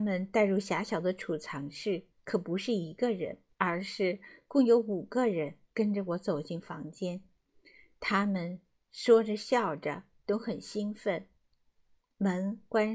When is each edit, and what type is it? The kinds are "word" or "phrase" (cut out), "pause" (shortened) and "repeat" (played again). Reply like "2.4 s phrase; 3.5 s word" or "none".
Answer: 2.1 s pause; 3.5 s pause